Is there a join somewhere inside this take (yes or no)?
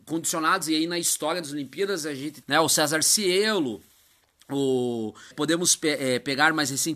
yes